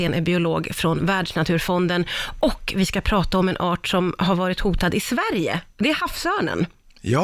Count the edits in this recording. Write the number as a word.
zero